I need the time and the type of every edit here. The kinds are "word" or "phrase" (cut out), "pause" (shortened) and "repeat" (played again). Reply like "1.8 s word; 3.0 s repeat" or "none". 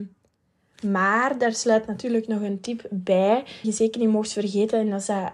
3.6 s word